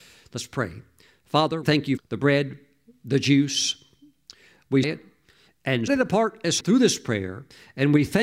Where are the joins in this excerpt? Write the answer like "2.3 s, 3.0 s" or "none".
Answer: 1.6 s, 2.0 s, 4.8 s, 5.9 s, 6.6 s